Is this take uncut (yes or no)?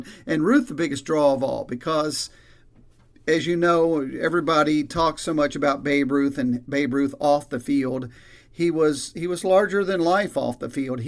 yes